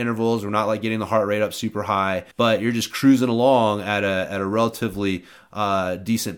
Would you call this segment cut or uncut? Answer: cut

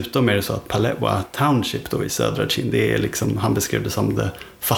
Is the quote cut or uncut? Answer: uncut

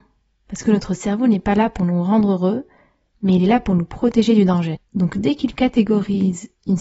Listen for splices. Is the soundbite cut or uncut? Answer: uncut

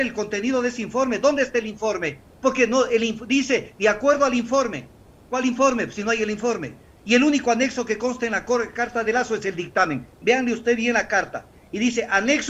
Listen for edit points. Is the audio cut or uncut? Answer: uncut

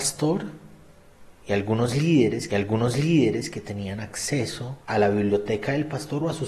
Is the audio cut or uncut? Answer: cut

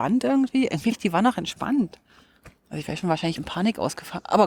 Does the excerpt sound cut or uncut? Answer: cut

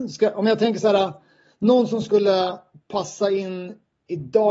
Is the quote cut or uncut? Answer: uncut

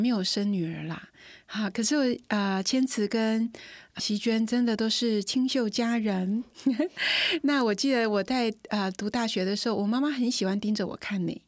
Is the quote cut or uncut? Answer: cut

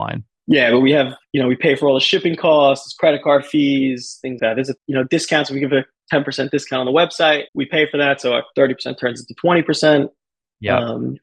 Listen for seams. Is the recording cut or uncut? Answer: cut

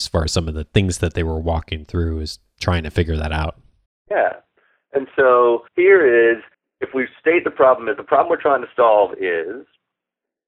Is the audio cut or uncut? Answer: cut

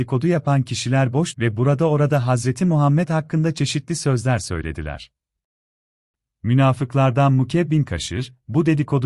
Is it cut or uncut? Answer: cut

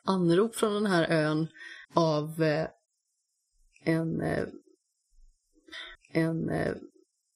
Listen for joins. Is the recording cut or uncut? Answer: cut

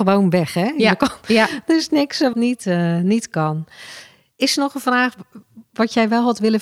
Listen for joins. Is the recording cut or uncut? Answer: cut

